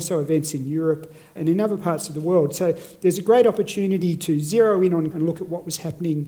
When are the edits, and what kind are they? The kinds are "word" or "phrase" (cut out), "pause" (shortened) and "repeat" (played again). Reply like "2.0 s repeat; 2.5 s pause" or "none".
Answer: 1.4 s word; 5.1 s word